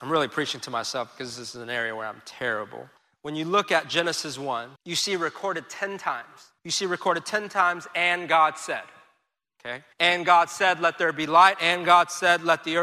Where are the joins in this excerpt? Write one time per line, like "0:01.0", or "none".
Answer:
0:03.0
0:04.8
0:06.6
0:09.9